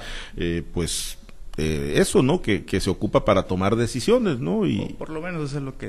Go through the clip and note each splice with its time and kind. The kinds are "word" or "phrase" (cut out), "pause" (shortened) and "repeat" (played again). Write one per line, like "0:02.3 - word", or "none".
none

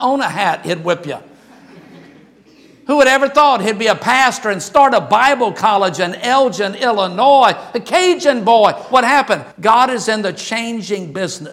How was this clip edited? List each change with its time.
0:09.5 - pause

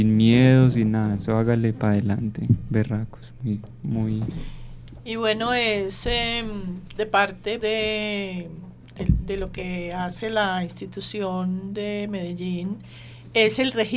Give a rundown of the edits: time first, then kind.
0:07.6 - word

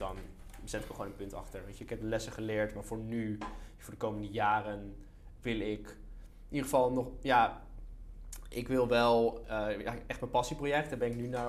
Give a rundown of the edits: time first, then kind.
none

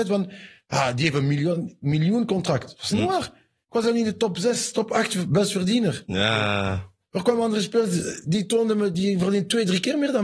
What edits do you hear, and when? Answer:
none

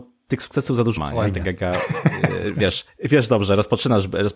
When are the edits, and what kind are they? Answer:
0:01.0 - word

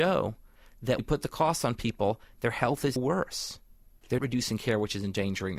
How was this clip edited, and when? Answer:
0:01.0 - word
0:03.0 - word
0:04.2 - word

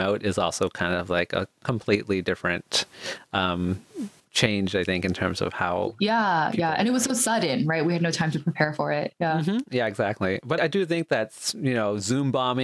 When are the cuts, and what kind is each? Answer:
0:10.6 - word

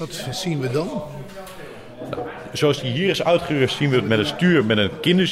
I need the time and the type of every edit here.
none

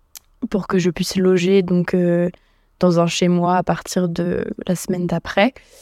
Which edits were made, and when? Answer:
none

